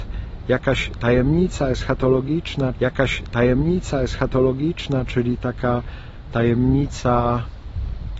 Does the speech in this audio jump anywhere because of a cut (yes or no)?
yes